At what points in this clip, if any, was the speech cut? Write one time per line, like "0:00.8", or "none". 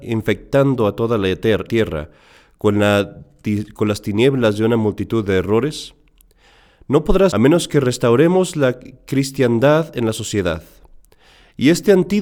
0:01.7
0:07.3